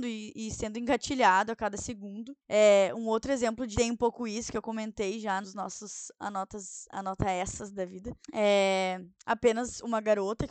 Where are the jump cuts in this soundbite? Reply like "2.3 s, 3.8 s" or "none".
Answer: 2.4 s, 3.7 s, 5.4 s, 8.2 s